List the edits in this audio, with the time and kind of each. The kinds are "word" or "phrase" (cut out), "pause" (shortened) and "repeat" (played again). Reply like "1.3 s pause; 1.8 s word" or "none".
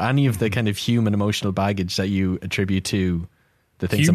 none